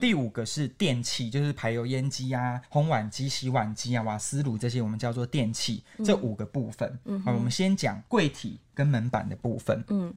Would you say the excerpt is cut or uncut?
cut